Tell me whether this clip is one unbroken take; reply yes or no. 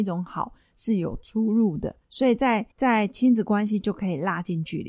no